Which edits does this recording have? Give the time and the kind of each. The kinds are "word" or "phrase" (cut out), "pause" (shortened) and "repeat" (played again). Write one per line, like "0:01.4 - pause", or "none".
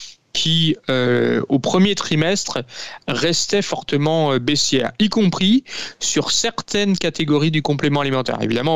none